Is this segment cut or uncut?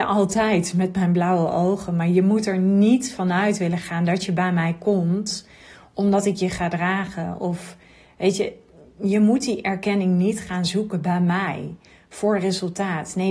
uncut